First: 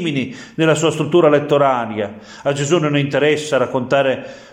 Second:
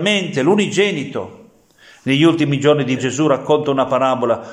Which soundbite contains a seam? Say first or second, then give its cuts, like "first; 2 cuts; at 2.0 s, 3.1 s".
second; 1 cut; at 3.0 s